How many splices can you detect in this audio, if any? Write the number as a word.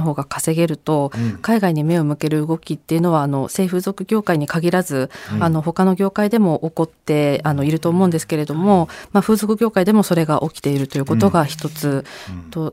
zero